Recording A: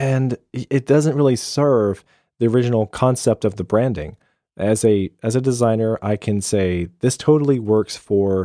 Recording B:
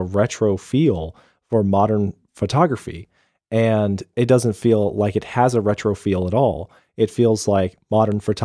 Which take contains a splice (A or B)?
B